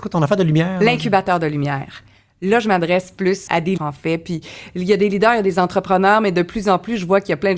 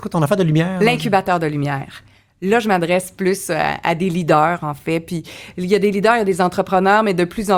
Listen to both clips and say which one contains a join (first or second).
first